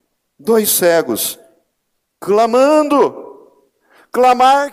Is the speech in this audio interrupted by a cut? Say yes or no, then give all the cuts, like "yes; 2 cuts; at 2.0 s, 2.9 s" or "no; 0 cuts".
no; 0 cuts